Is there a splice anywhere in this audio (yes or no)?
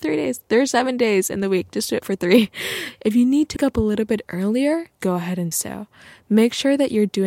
yes